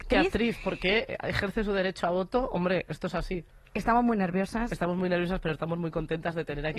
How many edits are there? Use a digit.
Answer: 0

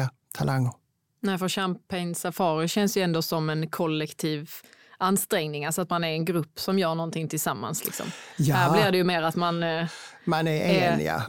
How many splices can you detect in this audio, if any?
0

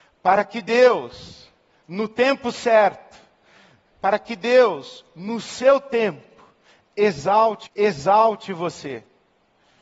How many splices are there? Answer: 1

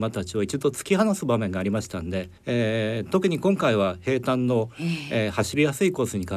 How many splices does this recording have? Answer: 1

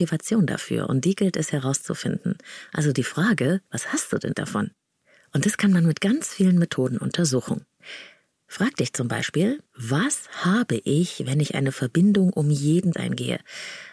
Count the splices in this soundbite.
4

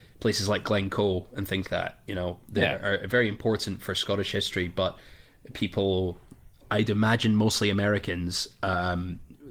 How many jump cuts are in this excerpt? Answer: 1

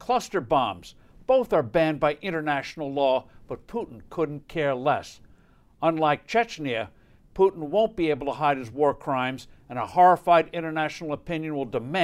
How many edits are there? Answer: 0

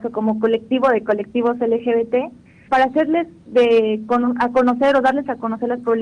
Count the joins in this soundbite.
1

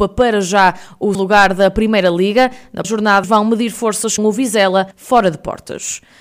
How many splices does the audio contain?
5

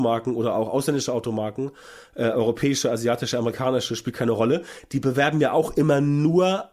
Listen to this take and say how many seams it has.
0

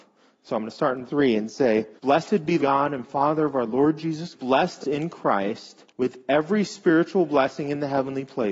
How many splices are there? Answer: 6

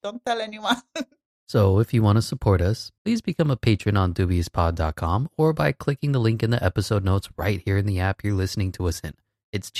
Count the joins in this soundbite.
0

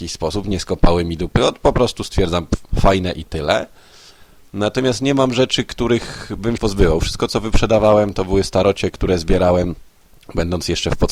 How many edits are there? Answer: 1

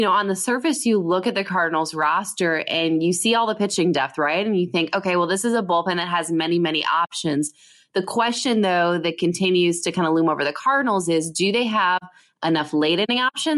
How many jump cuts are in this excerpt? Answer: 0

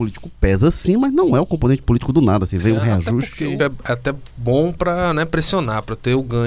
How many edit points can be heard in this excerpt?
1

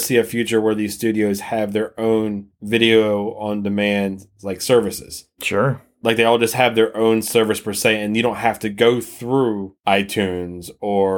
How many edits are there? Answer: 0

